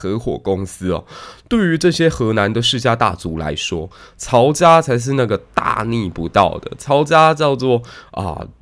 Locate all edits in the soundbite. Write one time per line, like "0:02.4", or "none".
none